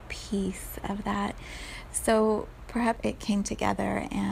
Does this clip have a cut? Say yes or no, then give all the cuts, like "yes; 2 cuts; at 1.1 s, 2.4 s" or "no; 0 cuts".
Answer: yes; 1 cut; at 3.0 s